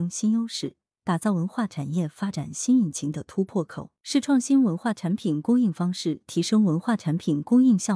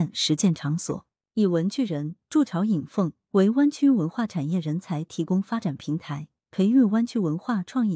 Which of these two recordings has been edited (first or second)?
first